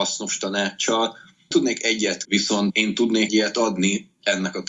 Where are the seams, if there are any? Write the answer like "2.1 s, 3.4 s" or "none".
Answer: 1.5 s, 2.2 s, 3.3 s